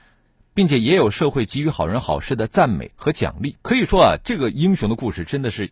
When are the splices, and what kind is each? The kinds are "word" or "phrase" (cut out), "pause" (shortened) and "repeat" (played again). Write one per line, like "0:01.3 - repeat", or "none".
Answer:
0:03.6 - pause